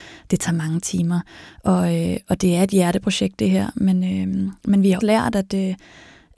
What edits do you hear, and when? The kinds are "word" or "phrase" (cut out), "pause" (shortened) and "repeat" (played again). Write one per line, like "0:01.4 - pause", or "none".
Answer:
0:05.0 - word